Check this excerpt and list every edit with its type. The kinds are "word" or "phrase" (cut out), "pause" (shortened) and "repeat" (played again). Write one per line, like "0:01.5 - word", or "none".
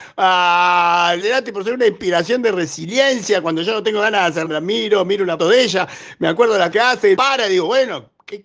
0:01.2 - word
0:04.5 - word
0:05.4 - word
0:06.7 - word
0:07.2 - word